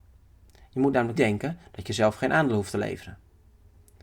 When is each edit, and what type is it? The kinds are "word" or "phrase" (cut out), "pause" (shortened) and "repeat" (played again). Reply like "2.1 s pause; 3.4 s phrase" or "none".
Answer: 1.2 s word